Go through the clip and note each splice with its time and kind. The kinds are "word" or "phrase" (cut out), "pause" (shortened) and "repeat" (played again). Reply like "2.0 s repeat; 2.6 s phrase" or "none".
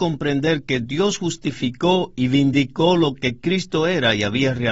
none